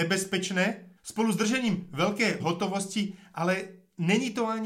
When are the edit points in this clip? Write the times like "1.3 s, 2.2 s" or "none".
1.0 s, 2.4 s